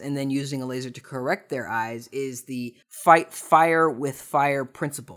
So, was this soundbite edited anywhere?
yes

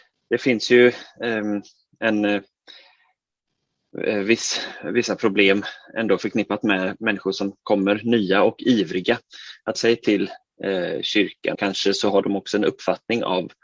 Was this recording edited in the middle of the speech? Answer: yes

